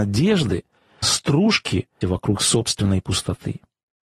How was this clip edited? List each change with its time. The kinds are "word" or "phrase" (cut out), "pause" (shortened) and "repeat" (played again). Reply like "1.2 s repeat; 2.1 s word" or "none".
1.0 s word; 2.0 s word